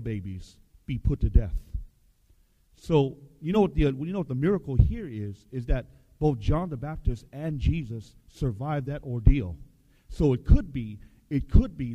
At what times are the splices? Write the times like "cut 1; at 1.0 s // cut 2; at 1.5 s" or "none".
none